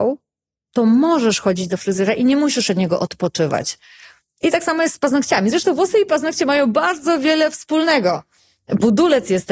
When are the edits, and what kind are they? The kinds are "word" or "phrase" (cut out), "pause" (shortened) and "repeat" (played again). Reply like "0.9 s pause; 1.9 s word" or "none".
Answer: none